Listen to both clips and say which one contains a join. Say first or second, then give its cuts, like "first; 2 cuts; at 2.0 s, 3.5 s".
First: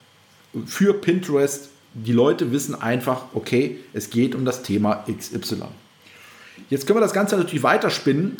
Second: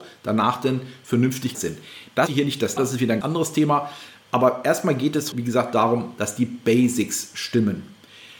second; 5 cuts; at 1.5 s, 2.3 s, 2.8 s, 3.2 s, 5.3 s